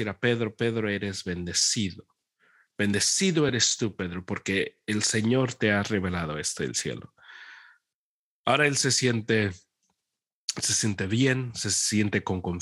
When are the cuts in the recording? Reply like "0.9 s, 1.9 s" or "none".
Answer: none